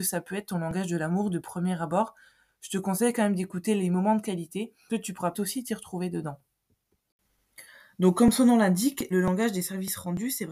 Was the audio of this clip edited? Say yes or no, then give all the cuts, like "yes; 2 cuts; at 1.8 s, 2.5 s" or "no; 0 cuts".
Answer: yes; 3 cuts; at 4.9 s, 5.3 s, 9.1 s